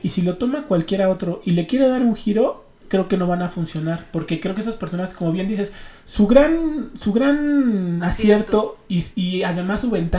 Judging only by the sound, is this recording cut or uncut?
uncut